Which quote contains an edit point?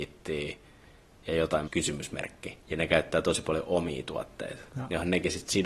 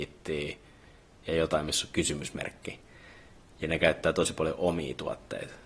first; 3 cuts; at 1.7 s, 2.6 s, 4.7 s

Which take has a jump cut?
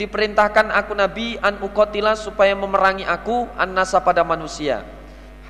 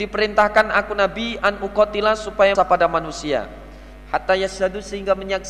second; 1 cut; at 2.5 s

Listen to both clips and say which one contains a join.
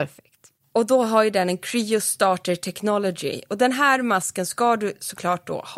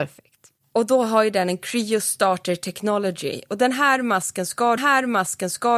second; 1 cut; at 4.8 s

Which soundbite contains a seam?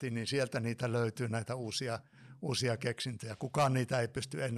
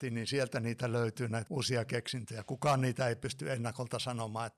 second; 1 cut; at 1.5 s

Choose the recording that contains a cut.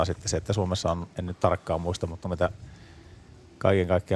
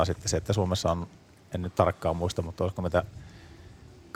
first; 2 cuts; at 1.1 s, 2.2 s

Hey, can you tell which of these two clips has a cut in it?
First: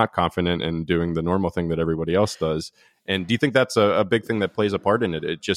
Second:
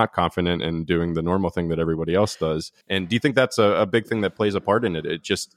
second; 1 cut; at 2.8 s

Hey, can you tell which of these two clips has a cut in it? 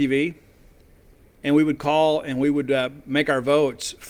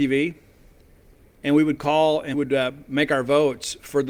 second; 1 cut; at 2.3 s

